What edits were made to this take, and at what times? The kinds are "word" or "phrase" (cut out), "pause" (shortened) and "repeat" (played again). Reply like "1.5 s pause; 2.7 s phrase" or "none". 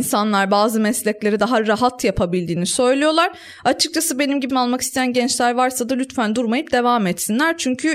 4.5 s word